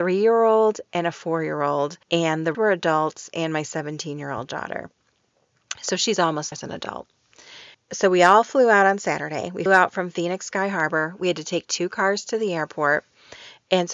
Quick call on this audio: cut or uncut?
cut